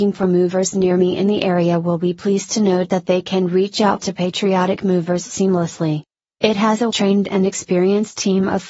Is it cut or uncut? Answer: cut